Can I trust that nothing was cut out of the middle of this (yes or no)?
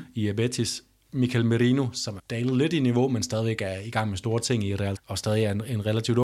no